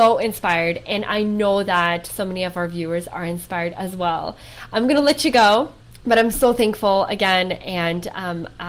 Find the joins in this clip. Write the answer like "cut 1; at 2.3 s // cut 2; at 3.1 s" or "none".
cut 1; at 5.9 s